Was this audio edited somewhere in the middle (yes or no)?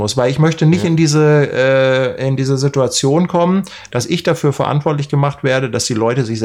no